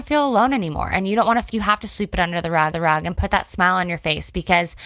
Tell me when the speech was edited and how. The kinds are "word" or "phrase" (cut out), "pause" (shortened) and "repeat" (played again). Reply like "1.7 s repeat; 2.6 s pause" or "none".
1.5 s word; 2.7 s repeat